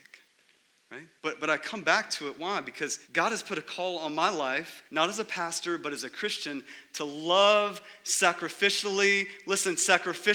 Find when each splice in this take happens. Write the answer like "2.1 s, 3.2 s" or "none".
1.2 s, 3.0 s, 4.8 s